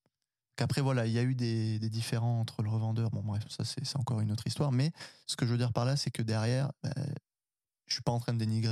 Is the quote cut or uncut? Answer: uncut